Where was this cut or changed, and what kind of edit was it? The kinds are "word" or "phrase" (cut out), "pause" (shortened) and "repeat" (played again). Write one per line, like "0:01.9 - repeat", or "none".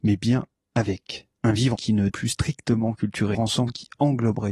0:01.3 - pause
0:01.8 - word
0:02.1 - word
0:03.3 - phrase